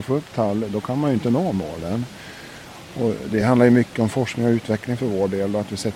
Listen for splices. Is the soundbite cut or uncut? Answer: uncut